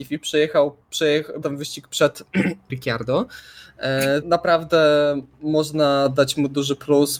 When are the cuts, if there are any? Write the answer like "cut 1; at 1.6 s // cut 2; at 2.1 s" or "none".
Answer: cut 1; at 1.4 s // cut 2; at 2.7 s // cut 3; at 4.2 s